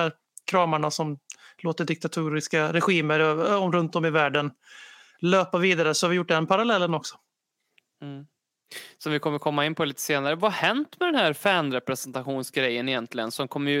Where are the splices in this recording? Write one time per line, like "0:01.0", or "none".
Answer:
none